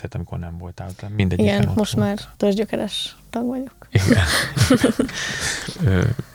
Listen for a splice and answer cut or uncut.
cut